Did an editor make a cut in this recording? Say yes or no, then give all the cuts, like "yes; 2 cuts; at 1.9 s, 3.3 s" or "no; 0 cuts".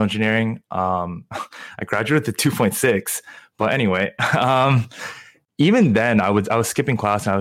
no; 0 cuts